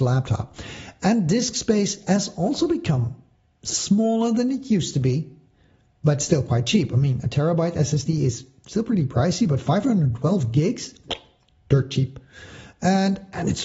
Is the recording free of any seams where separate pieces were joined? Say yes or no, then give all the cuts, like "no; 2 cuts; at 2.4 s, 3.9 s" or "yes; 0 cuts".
yes; 0 cuts